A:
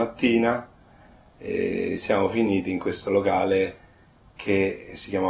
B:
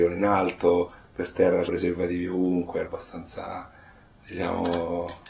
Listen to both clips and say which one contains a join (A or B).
B